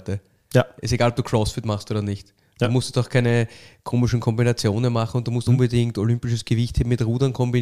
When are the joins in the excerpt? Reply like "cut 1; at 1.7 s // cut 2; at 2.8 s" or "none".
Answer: cut 1; at 5.5 s